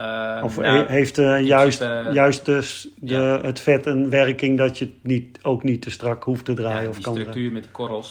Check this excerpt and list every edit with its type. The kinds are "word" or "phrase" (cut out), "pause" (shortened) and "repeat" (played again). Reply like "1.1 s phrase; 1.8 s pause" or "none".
none